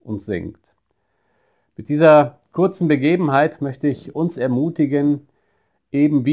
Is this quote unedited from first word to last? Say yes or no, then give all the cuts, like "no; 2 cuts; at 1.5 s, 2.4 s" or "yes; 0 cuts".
yes; 0 cuts